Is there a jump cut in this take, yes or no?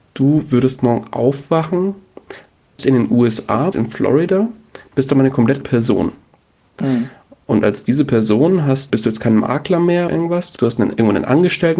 yes